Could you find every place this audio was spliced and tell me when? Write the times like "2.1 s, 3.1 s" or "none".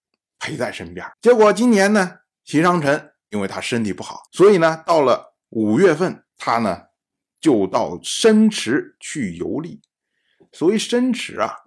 1.1 s, 4.3 s, 6.3 s